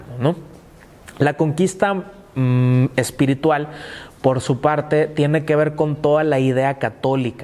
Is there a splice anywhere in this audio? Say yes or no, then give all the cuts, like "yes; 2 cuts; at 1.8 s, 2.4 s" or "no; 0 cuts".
no; 0 cuts